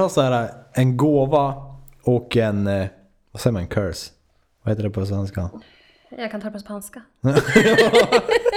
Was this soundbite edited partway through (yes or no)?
no